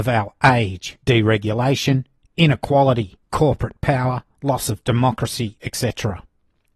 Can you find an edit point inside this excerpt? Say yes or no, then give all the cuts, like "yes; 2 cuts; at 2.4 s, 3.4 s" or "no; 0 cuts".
yes; 3 cuts; at 1.0 s, 3.2 s, 4.3 s